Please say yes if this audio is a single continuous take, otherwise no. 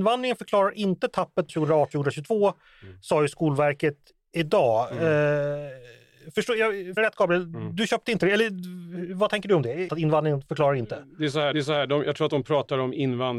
no